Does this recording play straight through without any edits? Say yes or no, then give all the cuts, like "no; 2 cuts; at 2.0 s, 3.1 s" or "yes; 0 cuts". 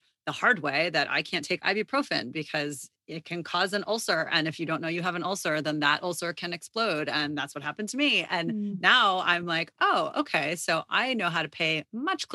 yes; 0 cuts